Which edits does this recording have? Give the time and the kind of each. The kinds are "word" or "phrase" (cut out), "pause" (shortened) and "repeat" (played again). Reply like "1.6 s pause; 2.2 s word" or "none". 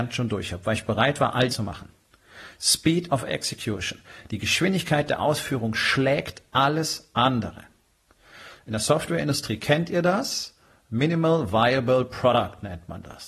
1.5 s phrase